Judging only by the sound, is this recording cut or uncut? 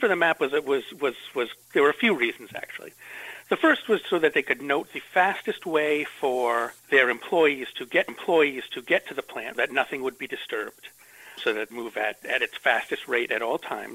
cut